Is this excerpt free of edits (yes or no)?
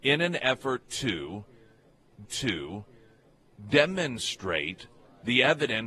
no